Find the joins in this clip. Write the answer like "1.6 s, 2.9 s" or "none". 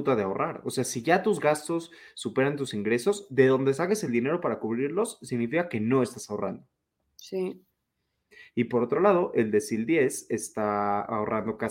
none